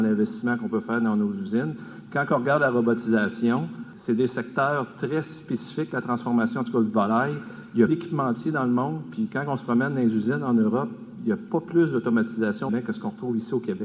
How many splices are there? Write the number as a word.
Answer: two